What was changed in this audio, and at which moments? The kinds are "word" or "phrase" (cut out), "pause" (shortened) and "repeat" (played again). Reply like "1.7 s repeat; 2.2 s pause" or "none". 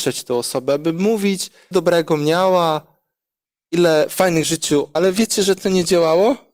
1.7 s word; 4.4 s word; 5.0 s word